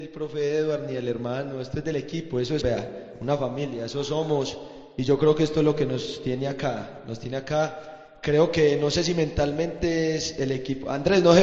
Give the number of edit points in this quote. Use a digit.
1